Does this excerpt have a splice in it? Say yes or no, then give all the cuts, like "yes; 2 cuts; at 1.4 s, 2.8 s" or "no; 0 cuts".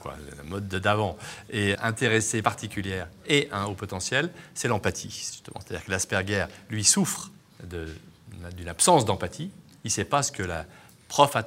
yes; 3 cuts; at 1.8 s, 2.4 s, 7.4 s